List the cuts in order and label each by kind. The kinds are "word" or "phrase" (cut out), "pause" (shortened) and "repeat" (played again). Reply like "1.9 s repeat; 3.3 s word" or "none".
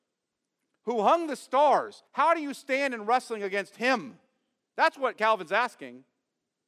2.1 s pause